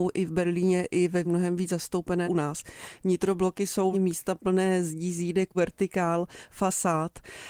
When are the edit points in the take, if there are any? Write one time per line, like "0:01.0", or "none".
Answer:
0:01.2
0:02.2
0:03.9
0:05.5